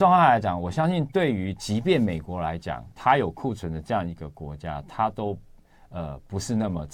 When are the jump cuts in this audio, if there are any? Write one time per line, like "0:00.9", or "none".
none